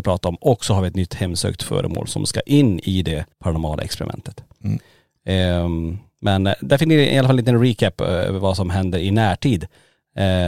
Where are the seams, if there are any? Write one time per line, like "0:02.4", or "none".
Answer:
0:03.3

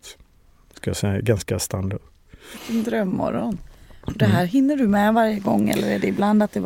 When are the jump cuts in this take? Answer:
none

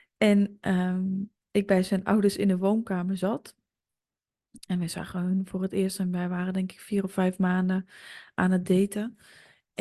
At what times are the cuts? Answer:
none

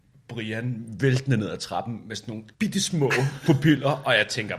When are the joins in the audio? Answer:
0:02.5

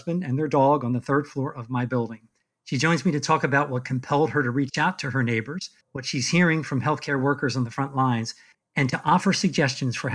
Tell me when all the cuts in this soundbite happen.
0:02.4
0:05.8
0:08.5

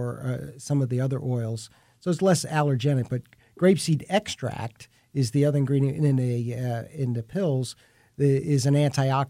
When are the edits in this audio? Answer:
none

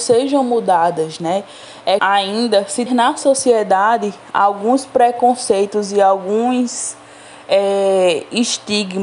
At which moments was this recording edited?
0:02.0
0:02.9

